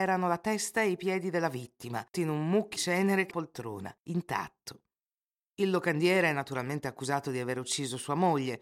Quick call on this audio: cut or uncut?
cut